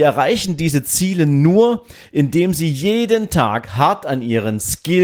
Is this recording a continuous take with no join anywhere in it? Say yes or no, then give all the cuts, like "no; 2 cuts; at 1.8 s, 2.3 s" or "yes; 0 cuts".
yes; 0 cuts